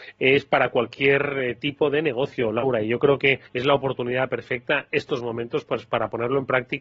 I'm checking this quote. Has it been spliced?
yes; 1 cut; at 3.5 s

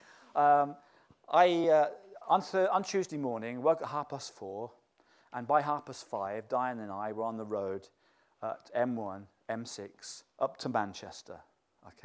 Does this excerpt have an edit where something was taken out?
no; 0 cuts

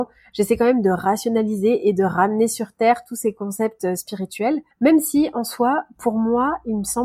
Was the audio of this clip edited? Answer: yes; 1 cut; at 4.7 s

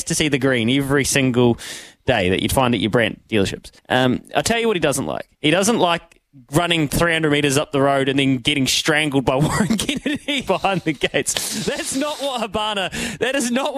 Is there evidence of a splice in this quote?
yes; 3 cuts; at 3.8 s, 5.3 s, 10.5 s

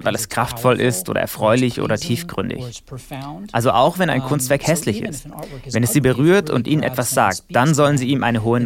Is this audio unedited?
yes; 0 cuts

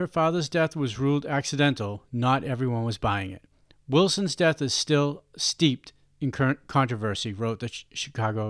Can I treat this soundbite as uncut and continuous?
yes; 0 cuts

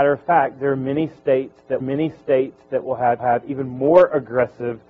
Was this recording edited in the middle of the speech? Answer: yes; 2 cuts; at 1.8 s, 3.2 s

